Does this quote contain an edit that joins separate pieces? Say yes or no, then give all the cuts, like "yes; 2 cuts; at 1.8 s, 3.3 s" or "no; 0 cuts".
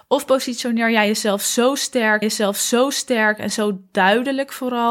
yes; 1 cut; at 2.2 s